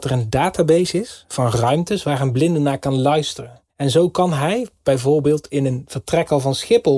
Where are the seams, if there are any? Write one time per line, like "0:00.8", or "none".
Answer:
0:03.7